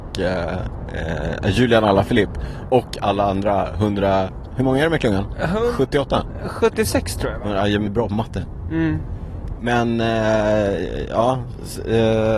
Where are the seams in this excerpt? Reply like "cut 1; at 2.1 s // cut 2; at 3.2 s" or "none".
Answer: cut 1; at 7.9 s